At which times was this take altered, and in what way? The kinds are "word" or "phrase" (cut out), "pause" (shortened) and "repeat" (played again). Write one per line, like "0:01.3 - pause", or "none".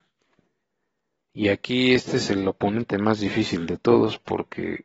none